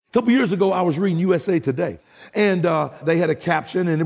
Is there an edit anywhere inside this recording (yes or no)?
yes